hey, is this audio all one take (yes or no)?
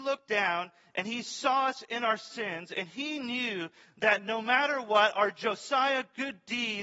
yes